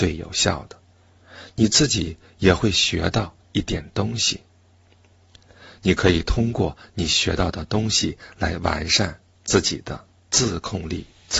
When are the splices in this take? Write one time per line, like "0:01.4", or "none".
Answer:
none